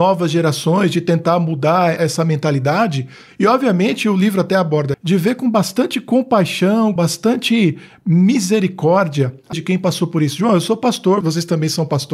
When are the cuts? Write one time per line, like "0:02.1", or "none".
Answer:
0:02.0
0:04.9
0:07.0
0:09.5
0:11.2